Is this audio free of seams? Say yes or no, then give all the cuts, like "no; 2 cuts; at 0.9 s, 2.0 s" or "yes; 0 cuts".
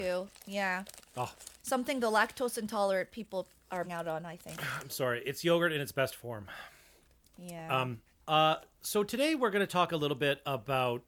no; 4 cuts; at 1.6 s, 3.8 s, 4.9 s, 8.1 s